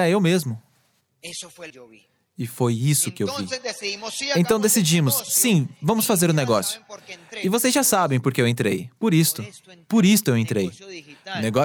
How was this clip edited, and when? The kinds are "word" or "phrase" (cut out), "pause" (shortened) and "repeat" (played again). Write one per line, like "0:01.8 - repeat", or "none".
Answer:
0:01.0 - pause
0:01.7 - phrase